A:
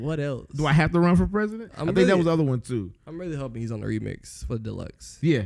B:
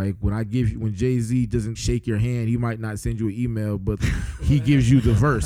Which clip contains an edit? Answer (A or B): B